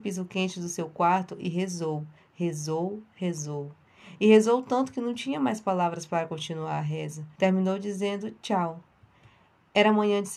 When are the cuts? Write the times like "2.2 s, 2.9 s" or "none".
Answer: 7.3 s

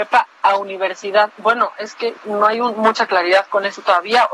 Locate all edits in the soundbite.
2.2 s

